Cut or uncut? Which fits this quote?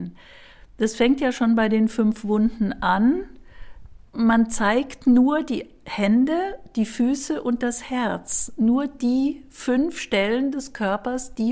uncut